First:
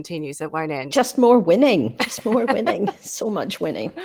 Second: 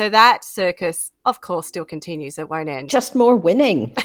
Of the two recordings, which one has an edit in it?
second; 1 cut; at 1.2 s

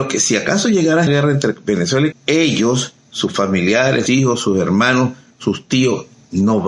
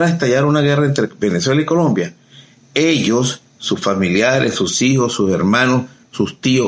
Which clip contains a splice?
first; 3 cuts; at 1.1 s, 2.1 s, 4.1 s

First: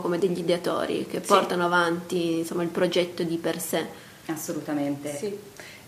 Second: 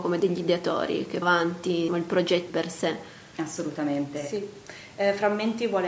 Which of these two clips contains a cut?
second; 3 cuts; at 1.2 s, 1.9 s, 2.5 s

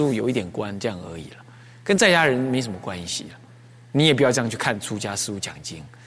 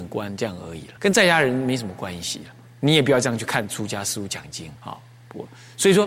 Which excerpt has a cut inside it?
second; 3 cuts; at 1.0 s, 2.7 s, 4.8 s

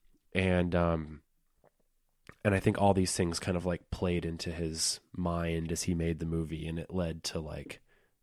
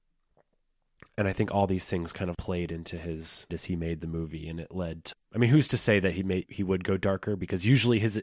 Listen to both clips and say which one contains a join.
second; 4 cuts; at 2.3 s, 3.5 s, 5.1 s, 6.4 s

